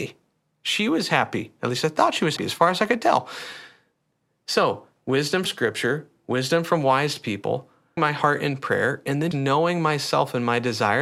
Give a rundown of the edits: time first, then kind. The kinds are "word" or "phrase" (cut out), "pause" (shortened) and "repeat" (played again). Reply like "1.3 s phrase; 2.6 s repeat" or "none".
2.4 s word; 5.4 s word; 8.0 s word; 9.3 s word